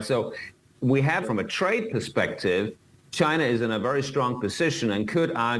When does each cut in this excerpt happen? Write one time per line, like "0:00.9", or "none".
0:01.2

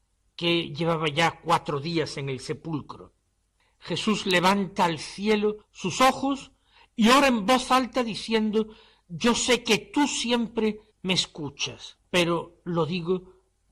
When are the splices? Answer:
0:05.6
0:10.9

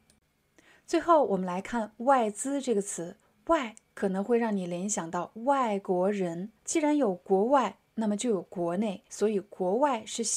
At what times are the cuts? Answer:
0:03.2
0:06.6
0:09.1

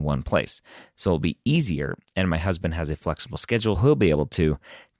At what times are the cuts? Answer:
0:03.8

